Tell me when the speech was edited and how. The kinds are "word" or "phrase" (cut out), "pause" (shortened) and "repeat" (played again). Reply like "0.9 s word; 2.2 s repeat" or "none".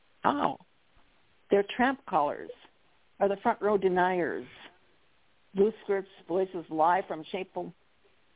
none